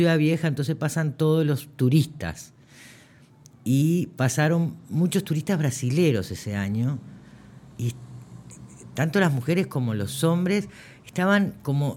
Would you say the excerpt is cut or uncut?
uncut